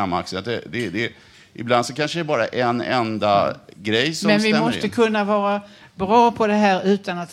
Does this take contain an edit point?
no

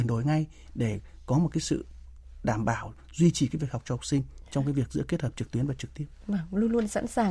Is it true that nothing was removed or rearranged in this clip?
yes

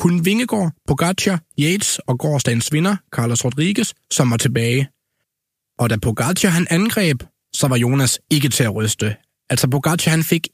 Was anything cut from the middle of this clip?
no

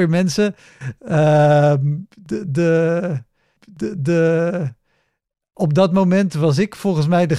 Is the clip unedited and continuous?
no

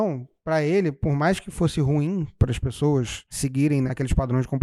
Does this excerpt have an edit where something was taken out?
no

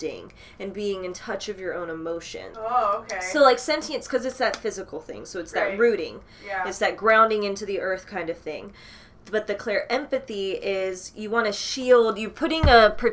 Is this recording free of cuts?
yes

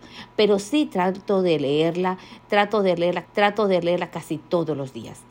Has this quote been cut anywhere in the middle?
yes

